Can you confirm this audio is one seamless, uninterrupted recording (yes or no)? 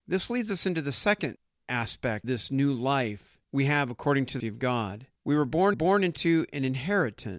no